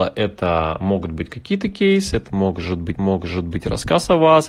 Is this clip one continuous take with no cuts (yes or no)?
no